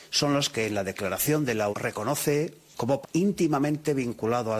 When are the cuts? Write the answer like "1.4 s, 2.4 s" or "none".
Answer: 1.7 s, 3.0 s